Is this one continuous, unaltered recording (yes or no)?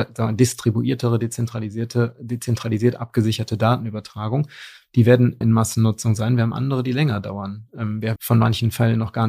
no